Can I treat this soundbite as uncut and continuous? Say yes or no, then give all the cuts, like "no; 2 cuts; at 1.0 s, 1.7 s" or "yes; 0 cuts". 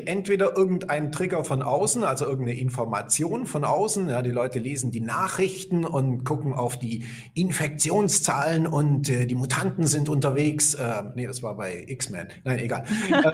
yes; 0 cuts